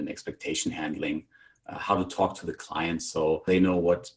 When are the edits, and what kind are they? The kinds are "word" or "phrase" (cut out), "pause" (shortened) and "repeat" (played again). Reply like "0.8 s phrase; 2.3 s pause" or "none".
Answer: none